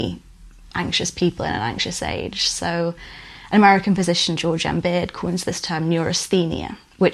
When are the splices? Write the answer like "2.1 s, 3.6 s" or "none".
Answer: none